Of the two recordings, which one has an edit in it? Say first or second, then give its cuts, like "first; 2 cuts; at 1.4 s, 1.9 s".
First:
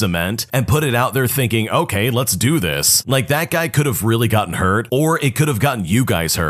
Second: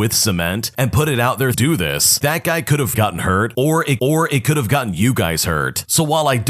second; 4 cuts; at 1.5 s, 2.2 s, 2.9 s, 4.0 s